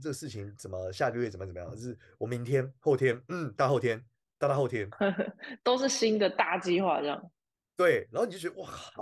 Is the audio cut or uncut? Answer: uncut